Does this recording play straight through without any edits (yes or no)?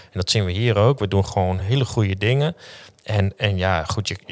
yes